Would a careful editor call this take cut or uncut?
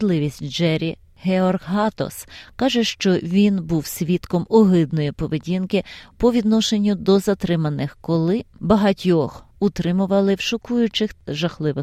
cut